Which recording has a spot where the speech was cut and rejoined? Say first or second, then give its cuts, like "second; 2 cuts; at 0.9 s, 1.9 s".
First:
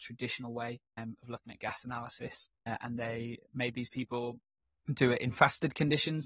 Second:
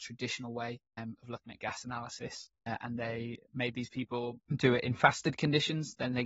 second; 1 cut; at 4.4 s